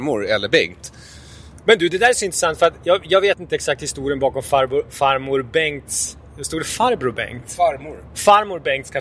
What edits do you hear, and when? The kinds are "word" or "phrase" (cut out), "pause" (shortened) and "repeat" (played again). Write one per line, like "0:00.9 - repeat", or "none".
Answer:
none